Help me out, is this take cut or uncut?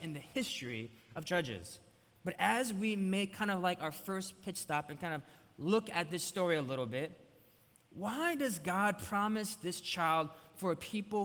uncut